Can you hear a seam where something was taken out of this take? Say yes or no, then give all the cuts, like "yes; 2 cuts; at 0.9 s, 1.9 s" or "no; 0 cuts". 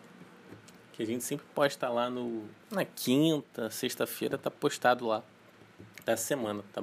yes; 1 cut; at 2.6 s